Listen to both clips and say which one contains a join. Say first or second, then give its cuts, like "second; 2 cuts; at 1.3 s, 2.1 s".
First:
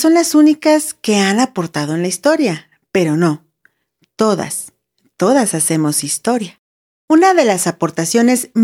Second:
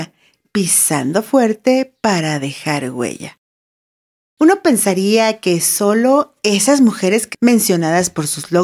second; 1 cut; at 7.3 s